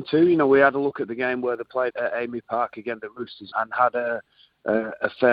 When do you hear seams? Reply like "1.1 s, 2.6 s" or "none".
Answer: 1.9 s, 3.5 s